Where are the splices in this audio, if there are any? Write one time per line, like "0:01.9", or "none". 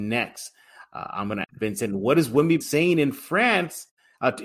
0:01.4
0:02.6